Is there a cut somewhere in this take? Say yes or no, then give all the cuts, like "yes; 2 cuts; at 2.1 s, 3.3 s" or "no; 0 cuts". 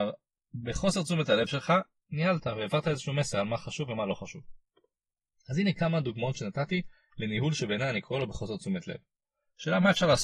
no; 0 cuts